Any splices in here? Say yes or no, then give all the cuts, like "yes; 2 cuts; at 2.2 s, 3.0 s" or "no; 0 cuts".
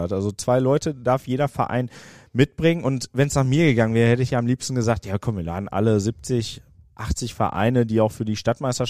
no; 0 cuts